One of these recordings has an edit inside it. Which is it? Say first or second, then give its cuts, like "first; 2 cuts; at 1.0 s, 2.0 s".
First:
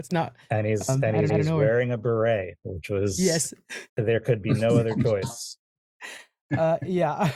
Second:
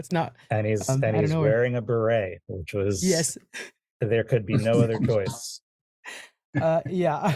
first; 2 cuts; at 1.3 s, 3.9 s